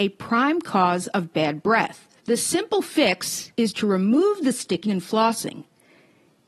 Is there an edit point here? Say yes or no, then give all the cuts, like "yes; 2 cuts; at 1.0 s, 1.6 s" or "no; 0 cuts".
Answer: yes; 3 cuts; at 2.2 s, 3.5 s, 4.8 s